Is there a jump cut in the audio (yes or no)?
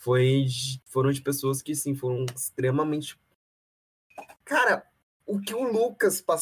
no